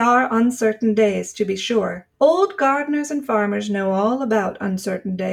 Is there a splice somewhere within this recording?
yes; 1 cut; at 2.1 s

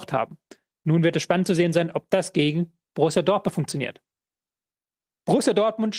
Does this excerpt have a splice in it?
no; 0 cuts

